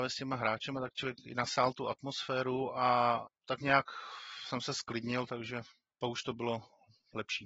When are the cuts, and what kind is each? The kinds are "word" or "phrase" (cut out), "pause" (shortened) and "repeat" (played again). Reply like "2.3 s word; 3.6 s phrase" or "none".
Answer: none